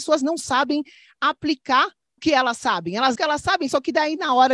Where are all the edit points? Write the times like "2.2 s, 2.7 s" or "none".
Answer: 2.2 s, 3.2 s